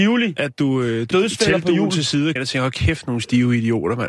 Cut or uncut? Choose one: cut